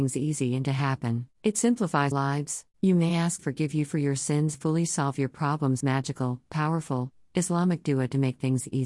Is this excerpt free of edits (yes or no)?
no